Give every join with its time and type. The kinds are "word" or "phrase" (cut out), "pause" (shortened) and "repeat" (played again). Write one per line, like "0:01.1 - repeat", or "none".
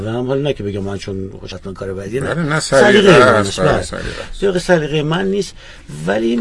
0:01.5 - phrase